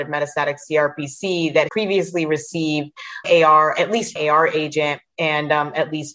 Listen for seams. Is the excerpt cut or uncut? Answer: cut